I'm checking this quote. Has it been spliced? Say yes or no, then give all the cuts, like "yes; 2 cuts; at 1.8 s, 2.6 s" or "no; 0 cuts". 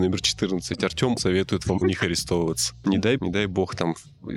yes; 3 cuts; at 1.2 s, 1.8 s, 3.2 s